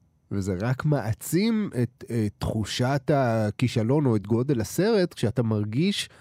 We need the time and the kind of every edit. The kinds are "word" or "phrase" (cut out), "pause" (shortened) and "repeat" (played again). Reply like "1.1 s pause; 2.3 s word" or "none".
none